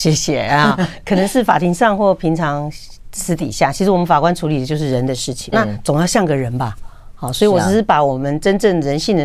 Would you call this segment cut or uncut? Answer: cut